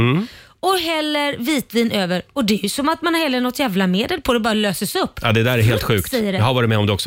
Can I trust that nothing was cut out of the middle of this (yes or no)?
yes